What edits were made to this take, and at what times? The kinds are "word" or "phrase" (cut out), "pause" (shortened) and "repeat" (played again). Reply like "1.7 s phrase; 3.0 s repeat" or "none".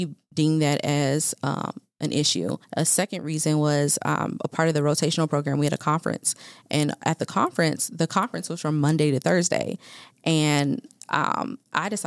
2.6 s pause

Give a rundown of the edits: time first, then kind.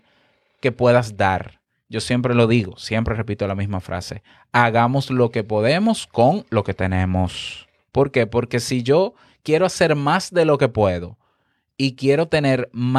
7.8 s pause

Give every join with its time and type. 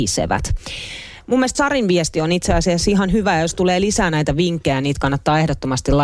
1.5 s word

